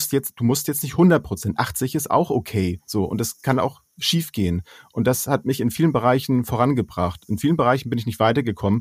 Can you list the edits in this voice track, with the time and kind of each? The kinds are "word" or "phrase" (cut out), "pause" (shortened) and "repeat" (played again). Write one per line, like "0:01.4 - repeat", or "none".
none